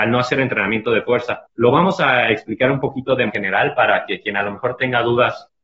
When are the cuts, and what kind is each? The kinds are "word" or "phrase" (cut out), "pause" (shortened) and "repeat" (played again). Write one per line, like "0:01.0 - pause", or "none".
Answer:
0:01.5 - pause
0:03.3 - word